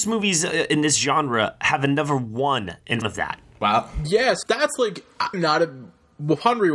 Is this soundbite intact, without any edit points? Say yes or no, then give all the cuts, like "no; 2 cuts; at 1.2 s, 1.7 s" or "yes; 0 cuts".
no; 3 cuts; at 3.0 s, 4.4 s, 5.3 s